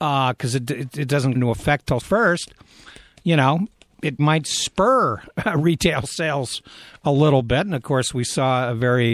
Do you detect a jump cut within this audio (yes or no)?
yes